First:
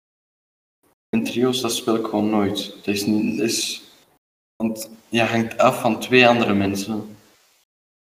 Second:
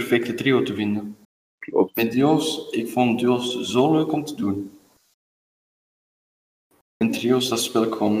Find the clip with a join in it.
second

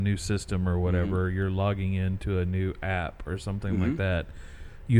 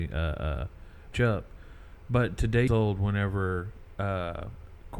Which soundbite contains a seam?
second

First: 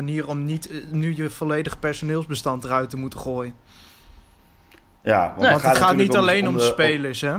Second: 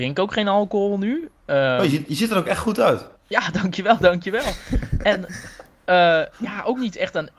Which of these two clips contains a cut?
second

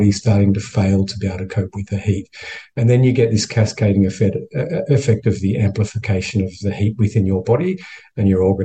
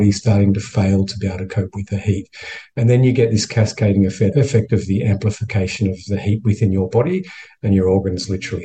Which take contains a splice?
second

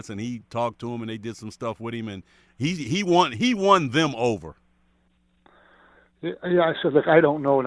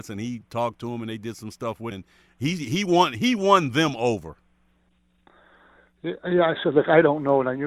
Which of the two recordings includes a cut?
second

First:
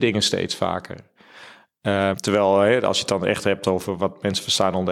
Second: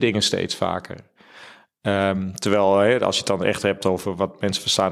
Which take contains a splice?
first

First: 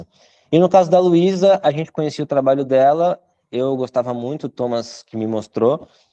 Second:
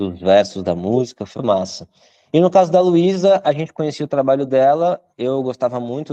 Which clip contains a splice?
second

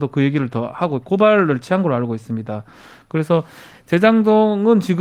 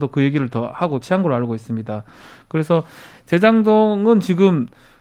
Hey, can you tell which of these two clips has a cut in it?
second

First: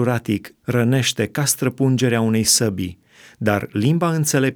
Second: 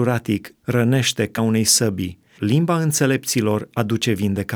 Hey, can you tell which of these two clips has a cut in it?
second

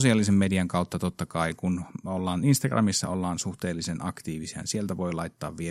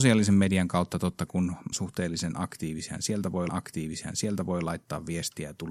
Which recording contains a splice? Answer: second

